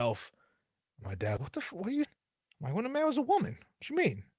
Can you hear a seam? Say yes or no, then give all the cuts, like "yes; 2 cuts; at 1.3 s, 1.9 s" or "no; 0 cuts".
yes; 2 cuts; at 1.4 s, 2.0 s